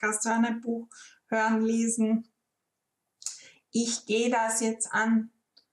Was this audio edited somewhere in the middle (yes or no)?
no